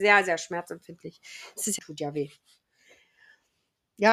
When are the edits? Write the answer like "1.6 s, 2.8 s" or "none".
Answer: 1.8 s